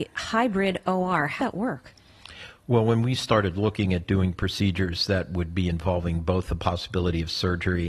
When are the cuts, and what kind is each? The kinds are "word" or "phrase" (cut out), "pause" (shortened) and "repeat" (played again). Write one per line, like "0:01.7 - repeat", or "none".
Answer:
0:01.4 - word